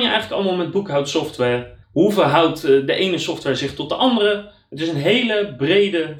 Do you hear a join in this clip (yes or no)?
yes